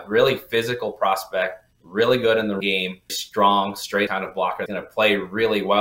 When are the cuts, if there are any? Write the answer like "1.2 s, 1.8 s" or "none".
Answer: 1.7 s, 2.6 s, 3.1 s, 4.1 s, 4.7 s

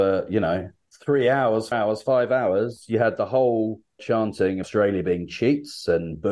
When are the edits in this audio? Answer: 1.7 s, 4.0 s, 4.6 s

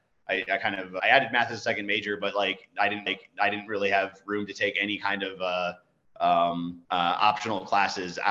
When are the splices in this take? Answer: 1.0 s, 3.1 s, 6.8 s

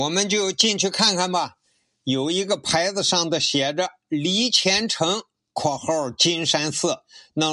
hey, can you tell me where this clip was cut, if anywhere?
none

